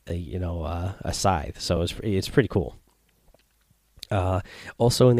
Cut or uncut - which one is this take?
uncut